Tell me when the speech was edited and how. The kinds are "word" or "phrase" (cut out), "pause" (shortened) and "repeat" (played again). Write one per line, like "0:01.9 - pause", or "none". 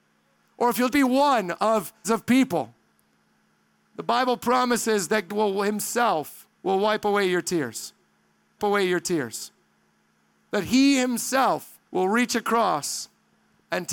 0:00.9 - word
0:02.0 - word
0:05.3 - word
0:06.5 - pause
0:08.6 - repeat
0:11.9 - pause